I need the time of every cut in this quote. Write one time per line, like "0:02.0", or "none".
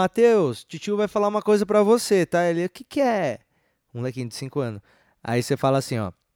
none